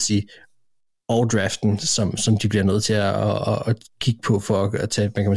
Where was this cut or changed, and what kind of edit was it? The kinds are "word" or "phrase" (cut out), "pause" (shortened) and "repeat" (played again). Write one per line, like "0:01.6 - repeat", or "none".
none

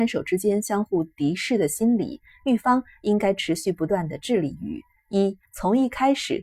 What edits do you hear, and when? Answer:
0:05.5 - pause

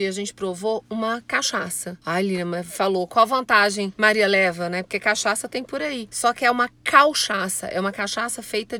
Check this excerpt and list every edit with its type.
none

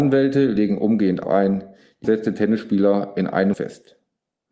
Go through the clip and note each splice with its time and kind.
0:01.2 - word
0:02.0 - word
0:03.5 - phrase

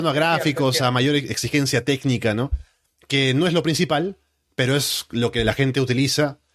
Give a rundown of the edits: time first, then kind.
none

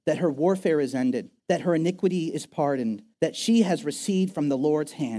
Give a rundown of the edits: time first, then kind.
0:01.4 - pause
0:03.1 - pause

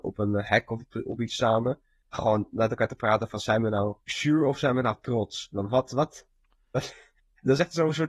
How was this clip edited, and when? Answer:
0:04.0 - pause

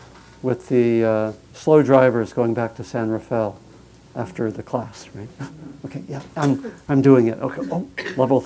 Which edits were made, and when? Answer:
none

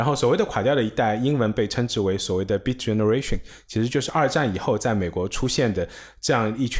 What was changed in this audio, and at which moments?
none

